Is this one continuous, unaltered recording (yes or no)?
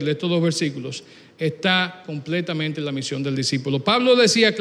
yes